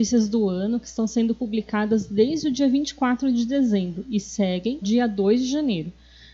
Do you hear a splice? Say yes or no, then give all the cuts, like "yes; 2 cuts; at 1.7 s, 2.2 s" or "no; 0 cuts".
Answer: yes; 1 cut; at 4.8 s